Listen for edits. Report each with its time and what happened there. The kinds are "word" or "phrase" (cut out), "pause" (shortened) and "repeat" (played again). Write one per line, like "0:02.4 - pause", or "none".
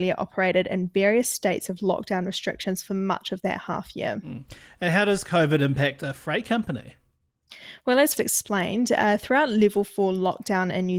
0:08.2 - word